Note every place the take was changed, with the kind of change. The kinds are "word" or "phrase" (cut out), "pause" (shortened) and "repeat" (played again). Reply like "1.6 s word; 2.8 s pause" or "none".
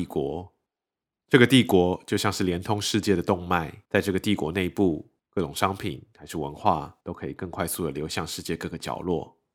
3.9 s pause; 5.2 s pause; 7.0 s pause